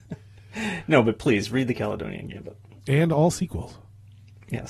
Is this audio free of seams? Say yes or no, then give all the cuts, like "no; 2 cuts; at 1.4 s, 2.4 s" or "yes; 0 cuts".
yes; 0 cuts